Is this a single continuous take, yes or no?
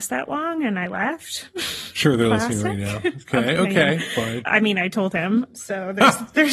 yes